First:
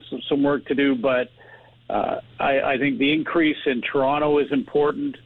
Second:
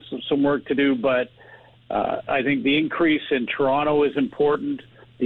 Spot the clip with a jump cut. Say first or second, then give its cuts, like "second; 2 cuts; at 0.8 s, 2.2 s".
second; 1 cut; at 2.3 s